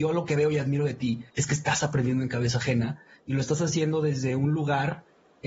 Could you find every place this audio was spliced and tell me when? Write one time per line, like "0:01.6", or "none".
0:01.3